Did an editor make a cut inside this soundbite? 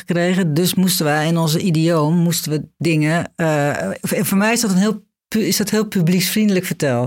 no; 0 cuts

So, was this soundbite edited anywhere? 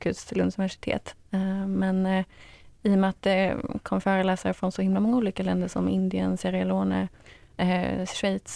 no; 0 cuts

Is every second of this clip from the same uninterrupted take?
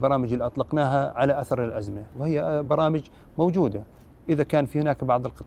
yes; 0 cuts

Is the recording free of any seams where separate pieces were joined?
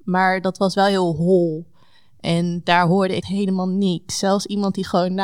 no; 1 cut; at 3.2 s

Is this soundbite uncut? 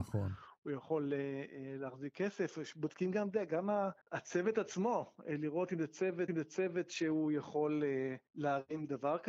no; 3 cuts; at 4.0 s, 6.3 s, 8.3 s

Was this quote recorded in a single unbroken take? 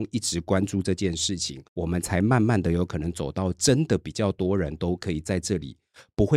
no; 1 cut; at 1.7 s

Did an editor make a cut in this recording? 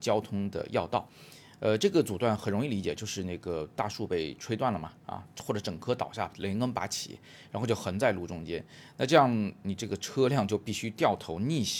no; 0 cuts

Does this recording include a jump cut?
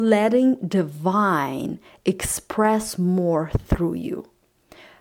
no; 0 cuts

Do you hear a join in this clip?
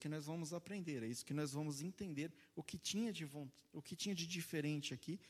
no; 0 cuts

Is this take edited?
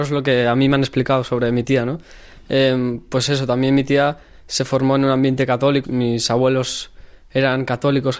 yes; 1 cut; at 5.8 s

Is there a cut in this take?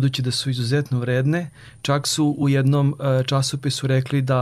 no; 0 cuts

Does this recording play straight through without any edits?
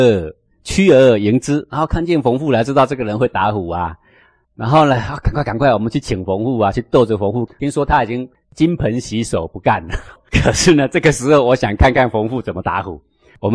yes; 0 cuts

